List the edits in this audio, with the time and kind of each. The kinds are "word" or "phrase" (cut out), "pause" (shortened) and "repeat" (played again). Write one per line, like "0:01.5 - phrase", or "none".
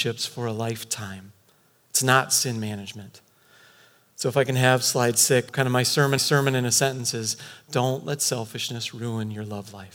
0:05.5 - word
0:06.2 - repeat

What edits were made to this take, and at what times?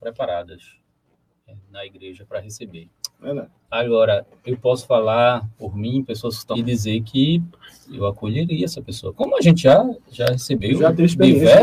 0:06.1 - phrase
0:06.5 - phrase

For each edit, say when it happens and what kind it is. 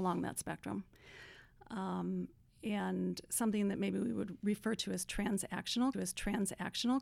0:05.9 - repeat

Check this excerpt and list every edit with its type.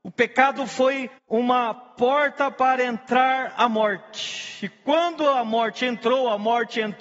0:01.2 - pause

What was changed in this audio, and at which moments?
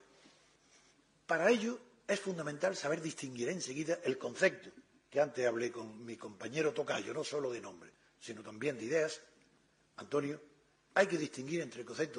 none

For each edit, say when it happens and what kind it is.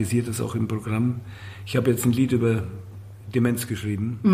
none

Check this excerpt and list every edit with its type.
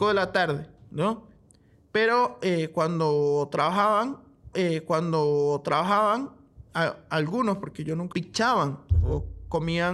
0:04.5 - repeat
0:08.1 - phrase

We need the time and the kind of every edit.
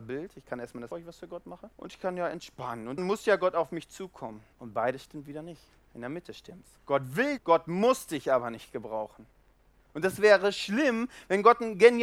0:00.9 - phrase
0:01.7 - pause
0:03.0 - word
0:04.5 - pause
0:06.8 - pause
0:07.4 - phrase

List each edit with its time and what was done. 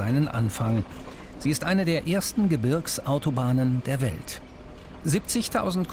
none

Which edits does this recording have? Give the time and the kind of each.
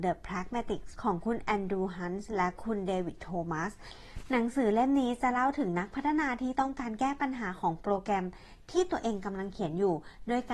0:01.0 - word

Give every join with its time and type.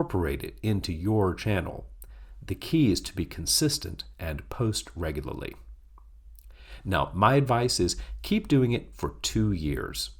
none

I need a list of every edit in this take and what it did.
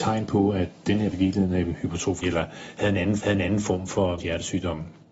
0:01.1 - word
0:02.2 - word
0:03.2 - repeat
0:04.2 - word

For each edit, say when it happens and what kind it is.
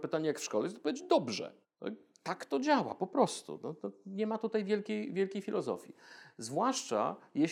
0:01.6 - pause

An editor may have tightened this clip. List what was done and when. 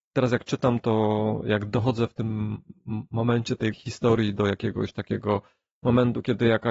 0:03.7 - word

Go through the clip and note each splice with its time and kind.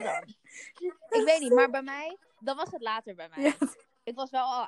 none

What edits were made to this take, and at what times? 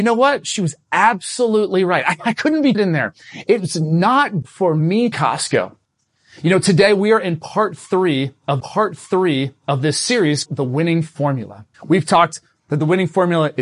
0:02.7 - word
0:04.4 - word
0:05.1 - phrase
0:08.6 - repeat
0:10.5 - word
0:11.7 - pause

